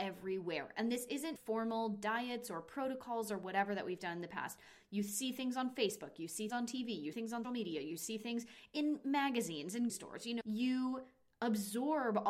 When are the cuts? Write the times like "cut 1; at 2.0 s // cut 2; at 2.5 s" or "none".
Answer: cut 1; at 1.4 s // cut 2; at 6.5 s // cut 3; at 7.1 s // cut 4; at 7.4 s // cut 5; at 9.9 s // cut 6; at 10.4 s